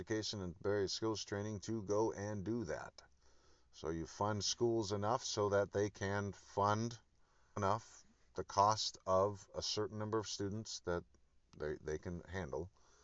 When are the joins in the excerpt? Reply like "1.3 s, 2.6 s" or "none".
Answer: 7.6 s